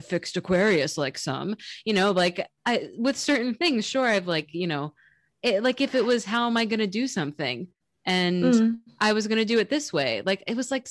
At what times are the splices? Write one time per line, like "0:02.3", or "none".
none